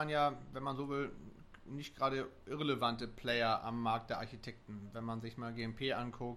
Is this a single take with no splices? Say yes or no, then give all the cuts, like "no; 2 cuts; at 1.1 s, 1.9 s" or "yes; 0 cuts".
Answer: yes; 0 cuts